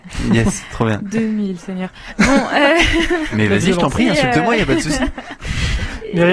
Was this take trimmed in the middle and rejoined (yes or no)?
no